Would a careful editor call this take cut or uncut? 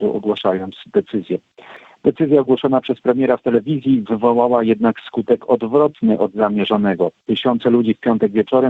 uncut